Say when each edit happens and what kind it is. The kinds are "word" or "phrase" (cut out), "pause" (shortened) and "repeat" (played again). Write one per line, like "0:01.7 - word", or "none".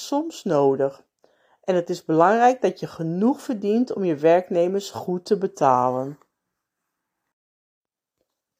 none